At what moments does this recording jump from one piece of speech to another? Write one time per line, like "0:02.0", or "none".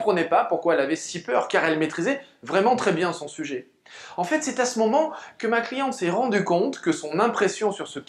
none